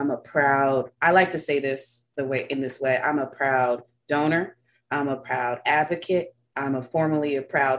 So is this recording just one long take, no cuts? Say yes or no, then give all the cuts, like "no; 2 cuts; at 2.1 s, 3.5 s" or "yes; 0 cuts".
yes; 0 cuts